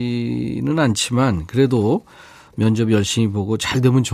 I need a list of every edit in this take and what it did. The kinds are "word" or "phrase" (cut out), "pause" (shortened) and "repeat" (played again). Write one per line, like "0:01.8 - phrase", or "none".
none